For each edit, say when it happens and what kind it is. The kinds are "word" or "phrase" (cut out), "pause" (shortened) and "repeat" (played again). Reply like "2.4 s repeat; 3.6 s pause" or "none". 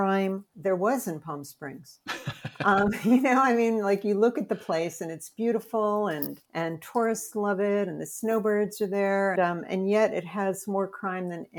6.5 s pause; 9.4 s phrase